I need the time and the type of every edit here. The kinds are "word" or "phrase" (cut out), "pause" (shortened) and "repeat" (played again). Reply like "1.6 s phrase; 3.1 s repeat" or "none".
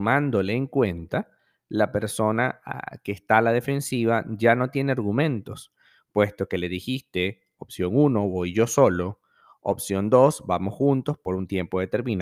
none